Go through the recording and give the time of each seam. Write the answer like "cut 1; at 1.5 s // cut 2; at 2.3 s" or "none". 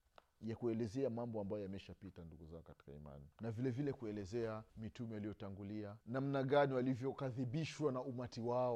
cut 1; at 3.3 s // cut 2; at 4.7 s // cut 3; at 6.0 s